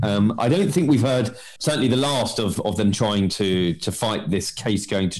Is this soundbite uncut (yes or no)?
no